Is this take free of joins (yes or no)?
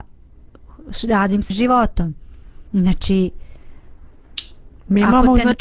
no